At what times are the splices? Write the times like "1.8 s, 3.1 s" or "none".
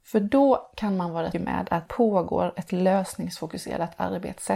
1.3 s, 1.9 s